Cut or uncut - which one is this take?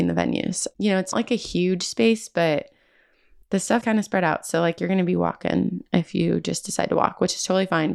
cut